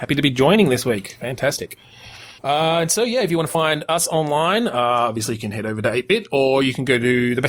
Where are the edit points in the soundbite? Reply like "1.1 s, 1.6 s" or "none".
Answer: 2.4 s